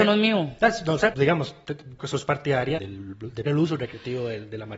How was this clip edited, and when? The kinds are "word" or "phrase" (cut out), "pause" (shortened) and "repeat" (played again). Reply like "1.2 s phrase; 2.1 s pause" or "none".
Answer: 1.1 s word; 2.0 s word; 2.8 s word; 3.5 s word